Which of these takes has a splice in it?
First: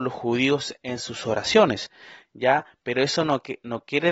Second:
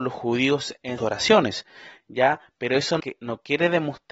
second; 2 cuts; at 1.0 s, 3.0 s

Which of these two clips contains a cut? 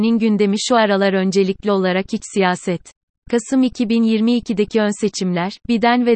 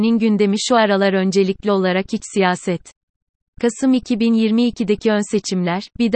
first; 1 cut; at 3.2 s

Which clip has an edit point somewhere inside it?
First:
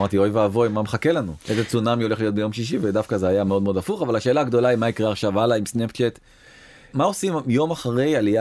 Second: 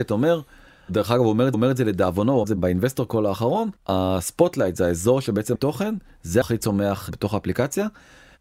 second; 5 cuts; at 1.5 s, 2.4 s, 3.8 s, 5.6 s, 6.4 s

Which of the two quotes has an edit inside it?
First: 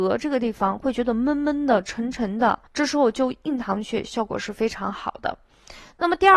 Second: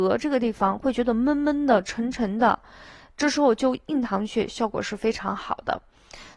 first; 1 cut; at 2.7 s

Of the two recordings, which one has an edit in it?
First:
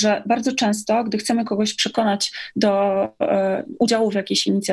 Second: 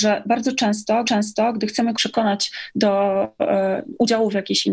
second; 2 cuts; at 1.0 s, 2.0 s

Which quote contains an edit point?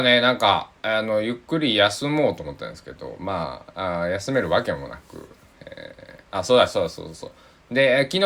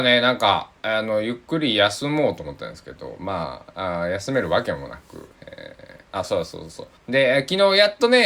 second; 3 cuts; at 5.3 s, 6.2 s, 7.0 s

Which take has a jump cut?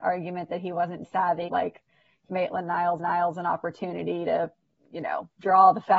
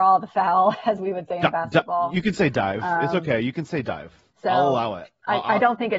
first; 5 cuts; at 1.0 s, 1.5 s, 2.3 s, 3.0 s, 4.6 s

